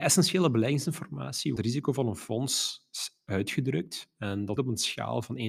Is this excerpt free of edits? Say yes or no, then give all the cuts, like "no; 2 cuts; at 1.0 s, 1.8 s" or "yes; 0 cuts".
no; 2 cuts; at 1.6 s, 4.6 s